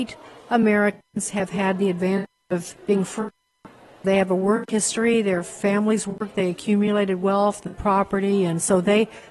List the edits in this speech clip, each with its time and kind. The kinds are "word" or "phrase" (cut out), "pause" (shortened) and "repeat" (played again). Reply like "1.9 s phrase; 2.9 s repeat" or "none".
2.8 s pause; 4.0 s word